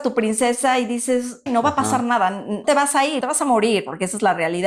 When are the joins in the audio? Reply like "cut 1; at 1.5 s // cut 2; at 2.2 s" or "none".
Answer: cut 1; at 1.5 s // cut 2; at 2.6 s // cut 3; at 3.2 s